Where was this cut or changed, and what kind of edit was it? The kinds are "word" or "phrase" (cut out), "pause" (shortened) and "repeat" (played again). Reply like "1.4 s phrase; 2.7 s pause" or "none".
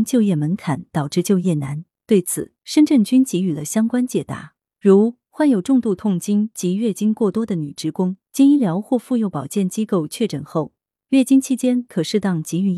2.6 s pause; 8.2 s pause